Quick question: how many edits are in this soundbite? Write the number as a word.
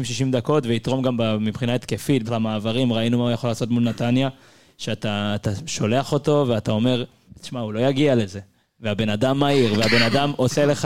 two